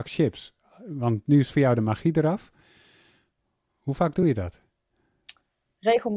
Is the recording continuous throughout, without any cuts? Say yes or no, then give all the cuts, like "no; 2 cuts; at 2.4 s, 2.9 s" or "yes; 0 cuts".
yes; 0 cuts